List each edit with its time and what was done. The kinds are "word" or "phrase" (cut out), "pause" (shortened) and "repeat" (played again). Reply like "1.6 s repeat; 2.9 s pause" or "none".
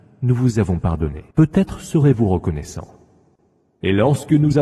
1.3 s pause